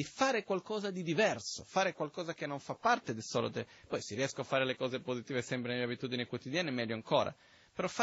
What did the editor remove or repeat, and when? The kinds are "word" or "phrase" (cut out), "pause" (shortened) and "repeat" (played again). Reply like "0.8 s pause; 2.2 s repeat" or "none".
none